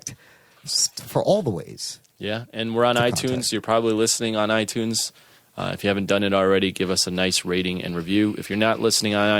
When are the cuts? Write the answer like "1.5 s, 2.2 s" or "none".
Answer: none